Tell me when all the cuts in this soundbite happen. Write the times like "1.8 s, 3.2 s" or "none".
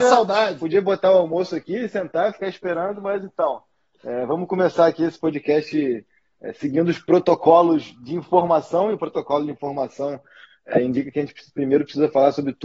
none